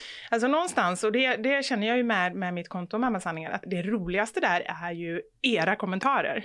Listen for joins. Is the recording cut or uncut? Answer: cut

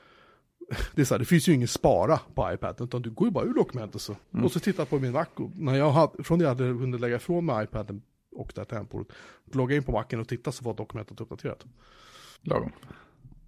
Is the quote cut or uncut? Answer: cut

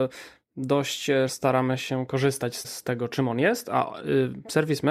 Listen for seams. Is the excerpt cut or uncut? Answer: cut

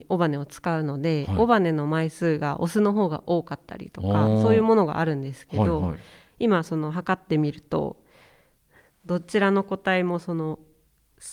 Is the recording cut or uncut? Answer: uncut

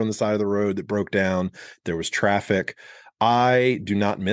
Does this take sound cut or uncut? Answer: uncut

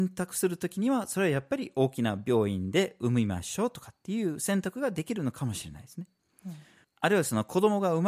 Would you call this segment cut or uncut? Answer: uncut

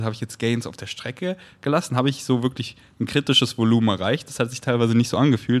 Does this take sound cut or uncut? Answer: uncut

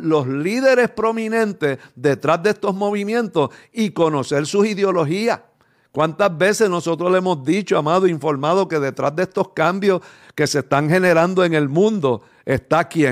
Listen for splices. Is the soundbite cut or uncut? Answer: uncut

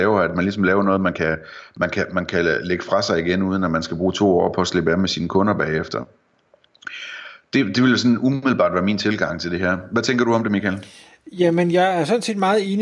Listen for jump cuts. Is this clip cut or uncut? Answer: uncut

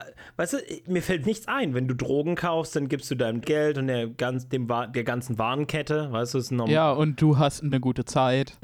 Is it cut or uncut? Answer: cut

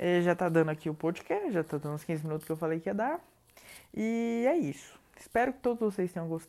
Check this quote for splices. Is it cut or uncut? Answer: uncut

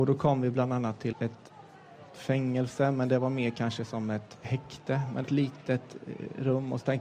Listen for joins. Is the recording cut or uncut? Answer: cut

